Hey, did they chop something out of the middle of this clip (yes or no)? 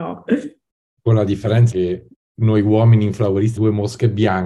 yes